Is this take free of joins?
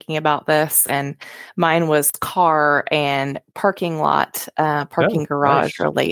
yes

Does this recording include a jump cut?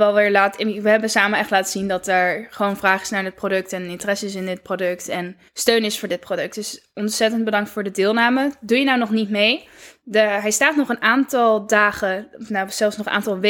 yes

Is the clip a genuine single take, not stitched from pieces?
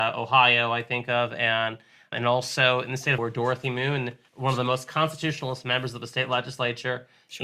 no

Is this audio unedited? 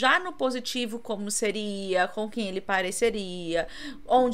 yes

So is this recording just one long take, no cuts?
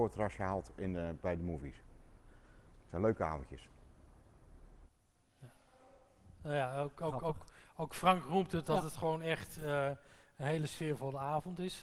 yes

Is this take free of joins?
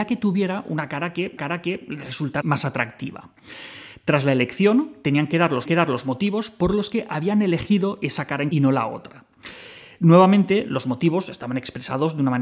no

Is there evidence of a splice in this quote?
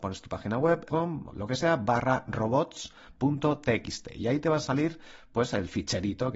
yes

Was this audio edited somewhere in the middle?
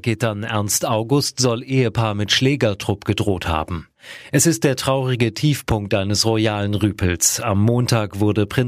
no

